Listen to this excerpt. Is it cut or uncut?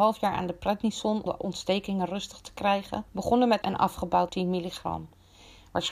cut